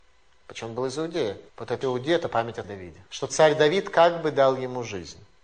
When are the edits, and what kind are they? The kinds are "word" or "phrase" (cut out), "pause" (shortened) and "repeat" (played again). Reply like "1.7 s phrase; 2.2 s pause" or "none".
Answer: 1.5 s pause; 1.8 s word; 2.6 s word; 3.1 s pause